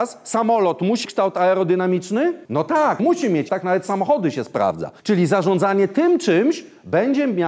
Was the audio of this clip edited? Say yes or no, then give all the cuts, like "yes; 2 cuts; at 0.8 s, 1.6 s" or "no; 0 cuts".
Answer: yes; 5 cuts; at 1.0 s, 2.4 s, 3.0 s, 3.5 s, 5.0 s